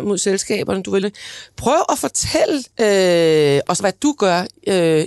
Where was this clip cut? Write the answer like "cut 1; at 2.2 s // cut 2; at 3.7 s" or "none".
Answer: cut 1; at 1.0 s // cut 2; at 2.7 s // cut 3; at 3.8 s